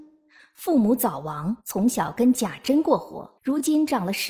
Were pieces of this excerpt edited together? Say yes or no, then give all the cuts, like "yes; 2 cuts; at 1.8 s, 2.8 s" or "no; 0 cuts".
yes; 2 cuts; at 1.6 s, 3.4 s